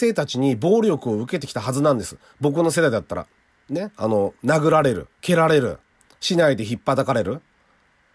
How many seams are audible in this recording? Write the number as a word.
three